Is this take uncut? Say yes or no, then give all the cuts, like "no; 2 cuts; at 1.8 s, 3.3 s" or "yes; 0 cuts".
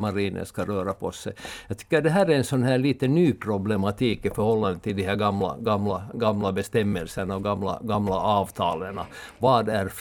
yes; 0 cuts